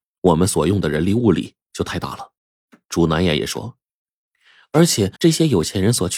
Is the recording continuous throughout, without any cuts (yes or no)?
no